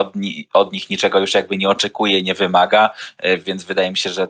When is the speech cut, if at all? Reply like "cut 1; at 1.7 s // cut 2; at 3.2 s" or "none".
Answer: cut 1; at 3.4 s